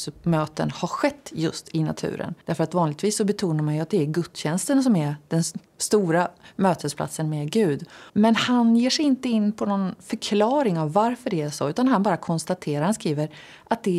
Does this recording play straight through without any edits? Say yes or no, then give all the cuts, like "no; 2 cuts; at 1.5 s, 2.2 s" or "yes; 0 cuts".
no; 3 cuts; at 2.4 s, 5.7 s, 8.1 s